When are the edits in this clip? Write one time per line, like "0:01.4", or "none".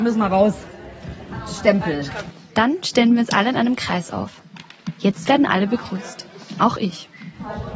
none